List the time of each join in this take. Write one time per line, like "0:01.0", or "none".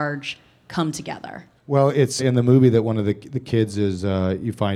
0:01.6
0:02.2